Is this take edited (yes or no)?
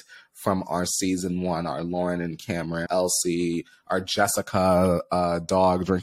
yes